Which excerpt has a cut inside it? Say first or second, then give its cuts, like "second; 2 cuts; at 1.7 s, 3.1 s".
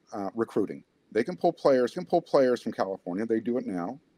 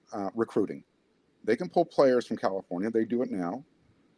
first; 2 cuts; at 0.9 s, 1.9 s